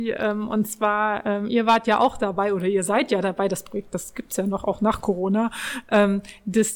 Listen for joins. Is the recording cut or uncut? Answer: uncut